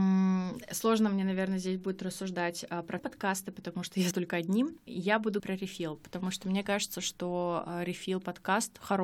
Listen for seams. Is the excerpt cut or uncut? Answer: cut